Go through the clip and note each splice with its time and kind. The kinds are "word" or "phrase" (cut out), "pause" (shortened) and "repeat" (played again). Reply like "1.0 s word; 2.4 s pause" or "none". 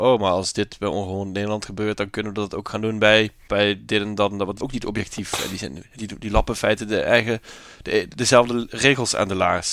3.5 s phrase; 4.6 s word